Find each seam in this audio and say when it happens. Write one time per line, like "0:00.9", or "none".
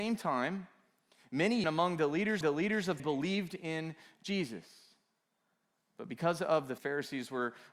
0:01.6
0:02.4
0:03.0
0:06.8